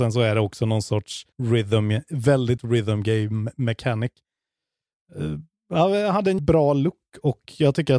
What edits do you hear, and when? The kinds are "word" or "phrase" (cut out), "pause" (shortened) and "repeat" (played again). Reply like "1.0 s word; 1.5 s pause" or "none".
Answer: 1.3 s pause; 2.6 s word; 6.4 s word